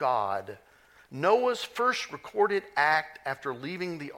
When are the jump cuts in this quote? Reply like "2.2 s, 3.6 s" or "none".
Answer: none